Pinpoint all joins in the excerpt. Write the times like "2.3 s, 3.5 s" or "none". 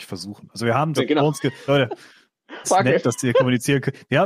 1.0 s, 1.7 s, 2.6 s